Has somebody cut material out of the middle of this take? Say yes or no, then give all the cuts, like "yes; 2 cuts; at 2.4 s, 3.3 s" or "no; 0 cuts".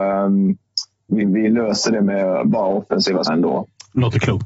yes; 2 cuts; at 1.2 s, 3.3 s